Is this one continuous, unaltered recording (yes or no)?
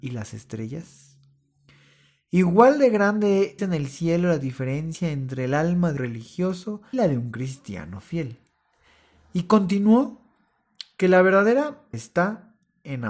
no